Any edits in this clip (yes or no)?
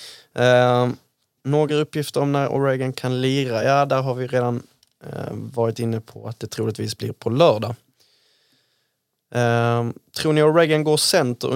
no